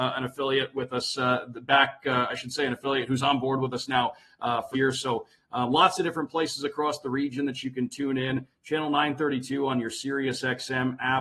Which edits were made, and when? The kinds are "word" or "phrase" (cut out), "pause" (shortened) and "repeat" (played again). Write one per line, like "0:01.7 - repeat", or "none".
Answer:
0:04.7 - word